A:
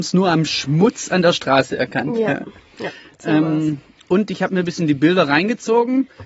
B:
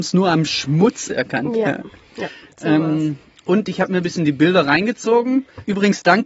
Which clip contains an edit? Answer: B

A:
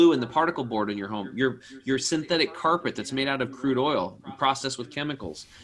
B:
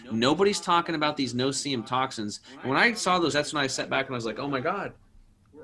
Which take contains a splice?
B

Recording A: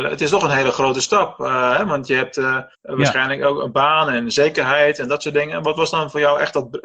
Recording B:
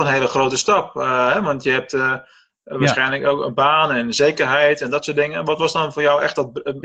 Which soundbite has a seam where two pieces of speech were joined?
A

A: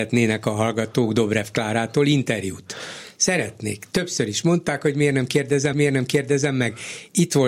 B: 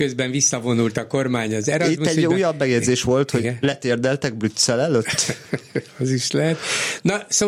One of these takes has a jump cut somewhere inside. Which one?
A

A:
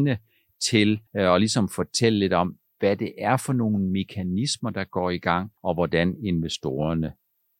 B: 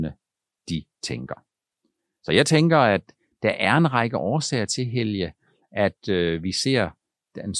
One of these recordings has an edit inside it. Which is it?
A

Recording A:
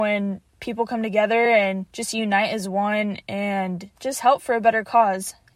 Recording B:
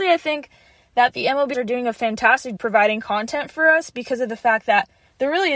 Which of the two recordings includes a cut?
B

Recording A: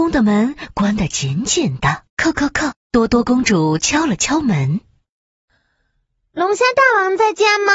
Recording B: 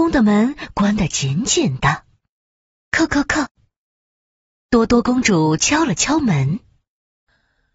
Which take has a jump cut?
A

